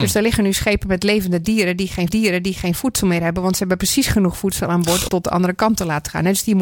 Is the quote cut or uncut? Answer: cut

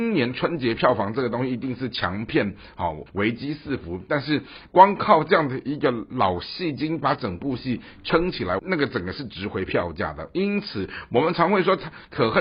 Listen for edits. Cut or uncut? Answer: cut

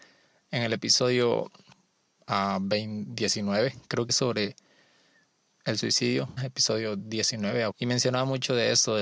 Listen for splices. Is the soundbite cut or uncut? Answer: cut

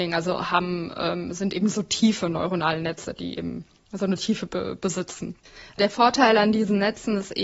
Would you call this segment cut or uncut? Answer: uncut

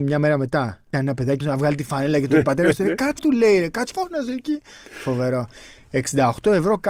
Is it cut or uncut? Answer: cut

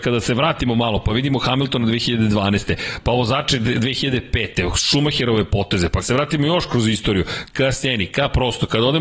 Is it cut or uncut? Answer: cut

